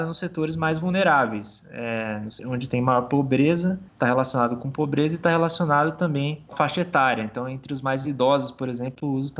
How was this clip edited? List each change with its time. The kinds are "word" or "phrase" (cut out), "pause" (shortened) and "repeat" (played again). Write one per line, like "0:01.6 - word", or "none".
0:02.4 - word
0:03.9 - pause
0:06.5 - word